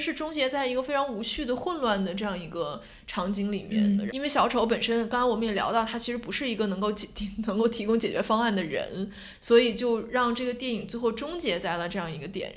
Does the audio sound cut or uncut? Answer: cut